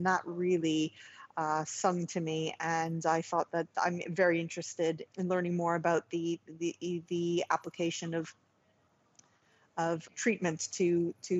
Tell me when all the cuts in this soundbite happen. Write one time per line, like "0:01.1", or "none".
0:05.1
0:10.1